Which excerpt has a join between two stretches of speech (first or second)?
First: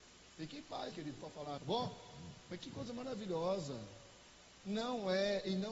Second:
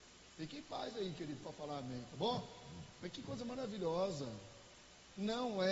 first